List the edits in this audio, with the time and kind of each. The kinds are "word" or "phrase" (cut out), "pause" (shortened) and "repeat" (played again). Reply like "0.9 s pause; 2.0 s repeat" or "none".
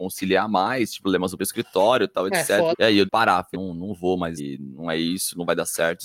1.0 s word; 1.4 s word; 2.7 s word; 3.1 s word; 3.5 s word; 4.4 s word